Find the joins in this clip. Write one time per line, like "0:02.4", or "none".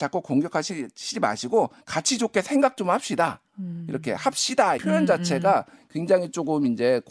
0:01.8
0:04.8